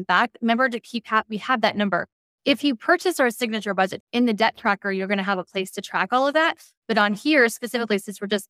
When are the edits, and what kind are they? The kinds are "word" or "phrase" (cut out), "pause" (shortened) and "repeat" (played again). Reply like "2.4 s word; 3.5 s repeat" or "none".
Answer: 4.0 s word